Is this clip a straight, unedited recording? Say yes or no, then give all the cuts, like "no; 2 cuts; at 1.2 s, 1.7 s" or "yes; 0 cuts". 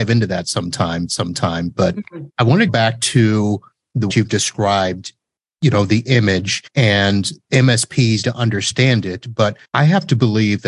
no; 7 cuts; at 1.1 s, 2.3 s, 2.7 s, 4.1 s, 6.7 s, 8.2 s, 9.6 s